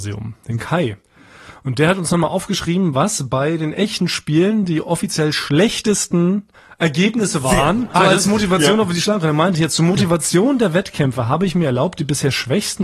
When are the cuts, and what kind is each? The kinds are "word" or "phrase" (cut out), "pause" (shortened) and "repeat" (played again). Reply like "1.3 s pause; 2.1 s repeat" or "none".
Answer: 4.0 s word; 6.5 s pause; 8.0 s word